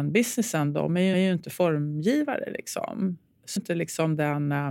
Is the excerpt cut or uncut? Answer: cut